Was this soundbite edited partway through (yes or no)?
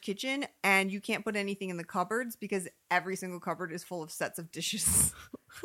no